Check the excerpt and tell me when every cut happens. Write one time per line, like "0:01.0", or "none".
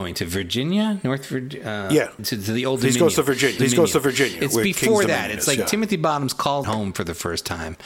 0:02.2
0:03.6
0:06.6